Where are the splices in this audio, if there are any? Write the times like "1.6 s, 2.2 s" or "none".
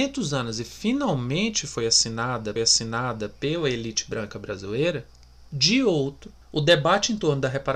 2.6 s